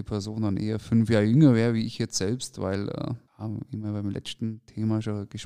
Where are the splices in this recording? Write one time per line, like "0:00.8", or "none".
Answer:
0:03.3